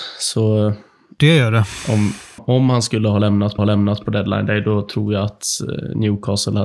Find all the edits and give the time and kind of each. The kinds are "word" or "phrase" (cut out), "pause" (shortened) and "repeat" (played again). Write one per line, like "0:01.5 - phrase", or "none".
0:02.4 - word
0:03.6 - repeat